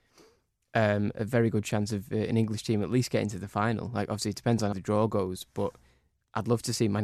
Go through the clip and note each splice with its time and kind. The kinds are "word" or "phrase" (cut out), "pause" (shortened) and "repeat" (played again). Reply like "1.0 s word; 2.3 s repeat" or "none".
4.7 s word